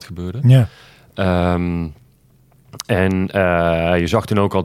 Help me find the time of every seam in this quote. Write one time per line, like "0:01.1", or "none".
none